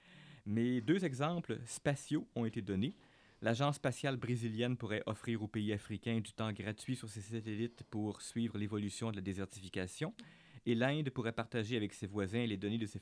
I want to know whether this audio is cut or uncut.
uncut